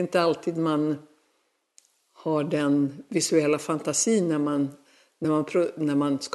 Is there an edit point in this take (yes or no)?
no